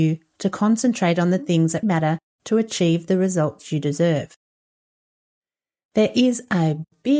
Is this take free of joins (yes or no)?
no